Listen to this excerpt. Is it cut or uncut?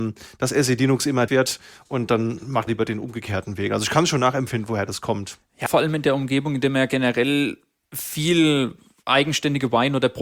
cut